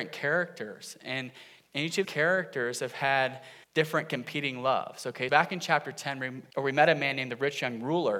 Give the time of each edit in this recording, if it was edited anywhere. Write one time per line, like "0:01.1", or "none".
0:02.0
0:03.6
0:05.3
0:06.5